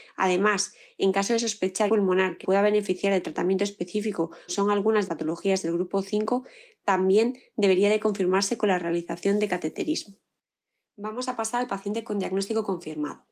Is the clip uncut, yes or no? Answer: no